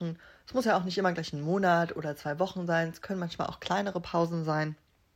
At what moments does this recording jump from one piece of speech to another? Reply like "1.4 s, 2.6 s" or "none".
none